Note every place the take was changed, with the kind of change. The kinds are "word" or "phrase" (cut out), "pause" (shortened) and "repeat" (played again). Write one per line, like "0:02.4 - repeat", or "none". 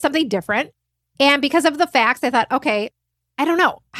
none